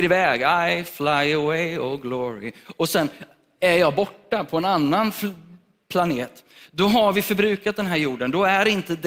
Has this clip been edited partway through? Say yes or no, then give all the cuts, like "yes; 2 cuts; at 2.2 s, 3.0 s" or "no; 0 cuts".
no; 0 cuts